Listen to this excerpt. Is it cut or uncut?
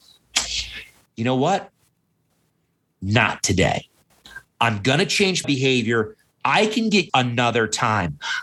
cut